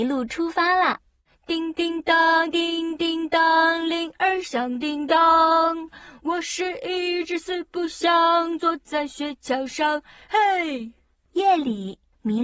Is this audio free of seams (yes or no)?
yes